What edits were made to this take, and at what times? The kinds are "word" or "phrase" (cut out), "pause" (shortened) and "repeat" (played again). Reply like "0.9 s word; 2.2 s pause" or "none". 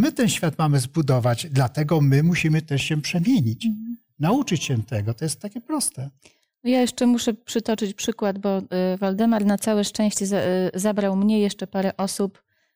none